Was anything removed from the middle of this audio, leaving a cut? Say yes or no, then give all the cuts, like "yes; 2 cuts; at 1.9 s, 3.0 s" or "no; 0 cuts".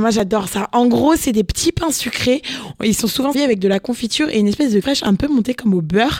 yes; 2 cuts; at 3.3 s, 4.8 s